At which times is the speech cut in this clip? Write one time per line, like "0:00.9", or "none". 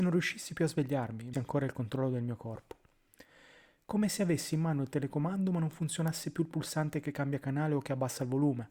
0:01.3